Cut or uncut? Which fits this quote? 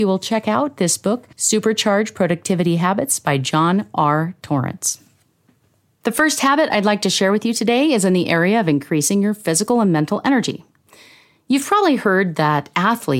cut